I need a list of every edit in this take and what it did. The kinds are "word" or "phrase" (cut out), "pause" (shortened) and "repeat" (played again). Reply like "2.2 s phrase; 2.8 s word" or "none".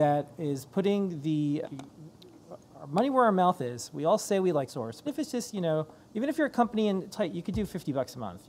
1.6 s word; 4.7 s word; 5.1 s word; 6.0 s pause; 7.1 s phrase